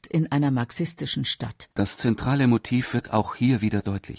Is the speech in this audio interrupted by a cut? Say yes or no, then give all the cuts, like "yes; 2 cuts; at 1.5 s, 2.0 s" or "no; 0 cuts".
yes; 1 cut; at 1.7 s